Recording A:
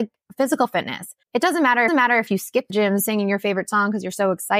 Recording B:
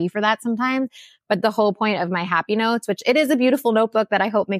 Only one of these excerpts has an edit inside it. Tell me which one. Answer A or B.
A